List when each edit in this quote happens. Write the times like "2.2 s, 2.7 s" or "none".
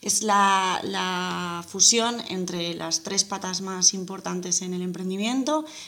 none